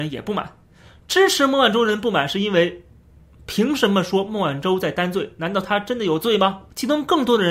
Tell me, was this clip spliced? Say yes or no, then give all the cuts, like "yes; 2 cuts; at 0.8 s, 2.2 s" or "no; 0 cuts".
no; 0 cuts